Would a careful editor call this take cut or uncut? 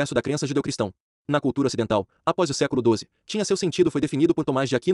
cut